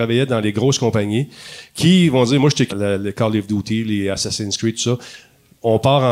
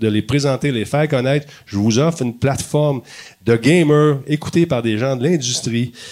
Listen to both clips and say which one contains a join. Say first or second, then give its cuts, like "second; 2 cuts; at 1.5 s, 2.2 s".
first; 1 cut; at 2.7 s